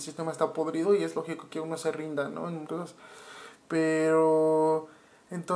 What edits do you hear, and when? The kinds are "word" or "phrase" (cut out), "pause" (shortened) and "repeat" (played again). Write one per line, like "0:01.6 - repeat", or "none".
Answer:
0:01.5 - phrase
0:02.6 - word